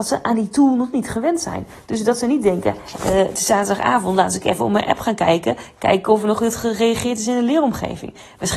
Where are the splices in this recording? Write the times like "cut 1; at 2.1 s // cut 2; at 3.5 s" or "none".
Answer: cut 1; at 3.0 s